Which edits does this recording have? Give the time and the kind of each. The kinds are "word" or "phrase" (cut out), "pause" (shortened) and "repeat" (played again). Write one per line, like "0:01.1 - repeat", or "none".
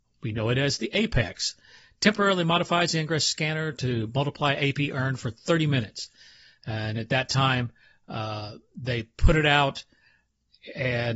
none